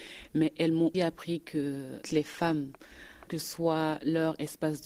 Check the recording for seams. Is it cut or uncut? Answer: cut